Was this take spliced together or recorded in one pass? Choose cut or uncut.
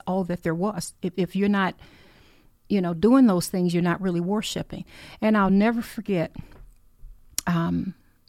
uncut